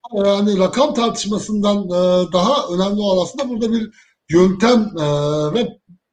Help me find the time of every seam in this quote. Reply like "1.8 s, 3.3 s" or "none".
none